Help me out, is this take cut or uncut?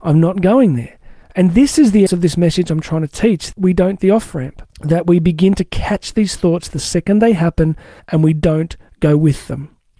cut